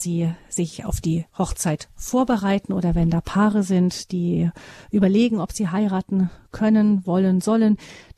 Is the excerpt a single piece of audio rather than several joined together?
no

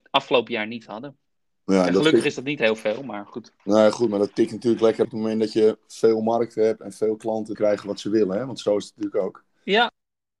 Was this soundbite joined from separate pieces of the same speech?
yes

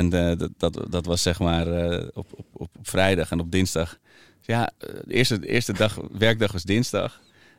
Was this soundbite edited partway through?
no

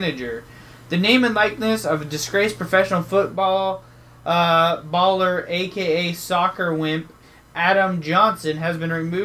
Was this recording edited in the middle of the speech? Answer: no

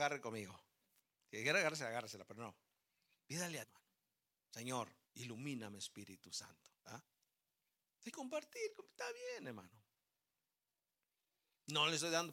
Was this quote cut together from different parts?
yes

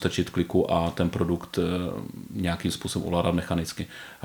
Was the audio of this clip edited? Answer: no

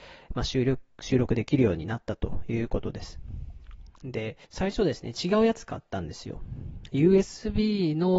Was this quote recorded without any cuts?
no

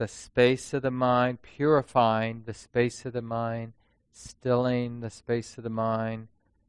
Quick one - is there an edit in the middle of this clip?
no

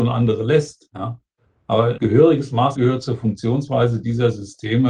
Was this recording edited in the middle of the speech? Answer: yes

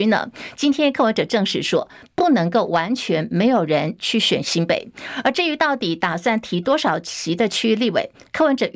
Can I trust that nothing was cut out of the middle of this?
yes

